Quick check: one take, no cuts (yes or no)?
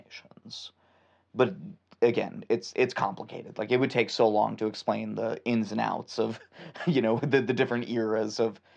yes